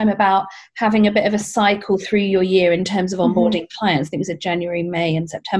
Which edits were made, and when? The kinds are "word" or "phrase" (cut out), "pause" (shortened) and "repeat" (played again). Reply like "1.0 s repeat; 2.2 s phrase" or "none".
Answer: none